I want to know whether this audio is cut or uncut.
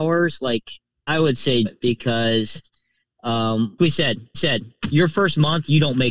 cut